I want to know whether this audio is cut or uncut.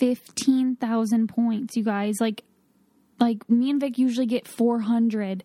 uncut